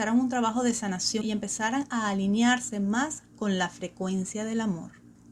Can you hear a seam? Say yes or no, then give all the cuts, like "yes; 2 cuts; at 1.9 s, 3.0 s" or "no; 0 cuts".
yes; 1 cut; at 1.2 s